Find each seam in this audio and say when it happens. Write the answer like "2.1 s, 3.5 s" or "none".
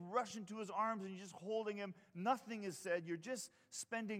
none